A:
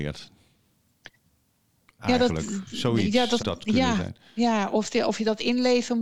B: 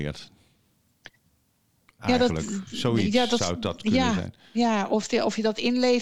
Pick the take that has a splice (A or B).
A